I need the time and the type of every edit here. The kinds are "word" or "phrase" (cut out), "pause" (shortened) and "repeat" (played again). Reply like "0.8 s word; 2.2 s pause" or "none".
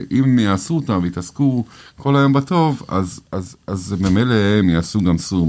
none

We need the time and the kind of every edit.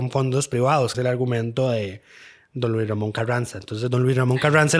0.9 s phrase

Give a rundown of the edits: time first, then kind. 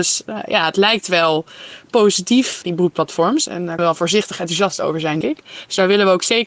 2.6 s word; 3.8 s word; 5.2 s word

